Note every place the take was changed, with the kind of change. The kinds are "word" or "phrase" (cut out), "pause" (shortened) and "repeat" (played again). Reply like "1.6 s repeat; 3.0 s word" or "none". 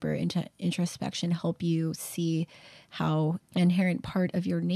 3.4 s word